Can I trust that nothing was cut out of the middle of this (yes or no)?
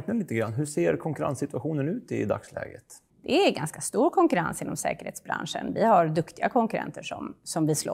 no